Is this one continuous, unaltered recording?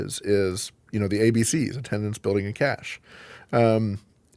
yes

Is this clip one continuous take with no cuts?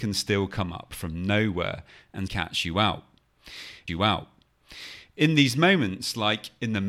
no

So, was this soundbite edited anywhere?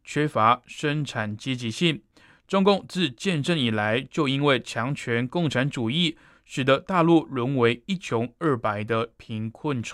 no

